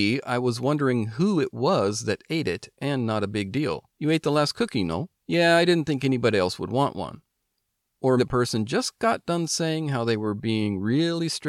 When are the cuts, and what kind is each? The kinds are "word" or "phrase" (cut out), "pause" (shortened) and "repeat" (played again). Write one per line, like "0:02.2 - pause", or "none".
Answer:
0:03.9 - pause
0:05.1 - pause
0:08.2 - word